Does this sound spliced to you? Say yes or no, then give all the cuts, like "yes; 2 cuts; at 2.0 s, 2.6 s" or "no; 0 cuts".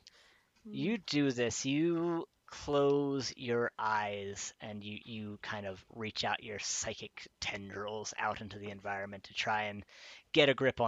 yes; 1 cut; at 5.0 s